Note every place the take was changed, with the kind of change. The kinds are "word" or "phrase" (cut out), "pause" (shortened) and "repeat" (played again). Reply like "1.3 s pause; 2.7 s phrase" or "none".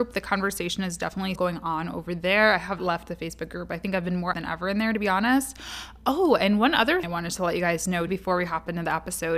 1.3 s word; 2.8 s word; 4.3 s word; 7.0 s word; 8.1 s word